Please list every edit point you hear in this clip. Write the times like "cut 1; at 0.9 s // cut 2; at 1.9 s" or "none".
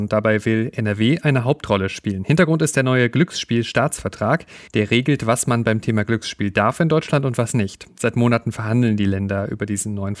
cut 1; at 4.7 s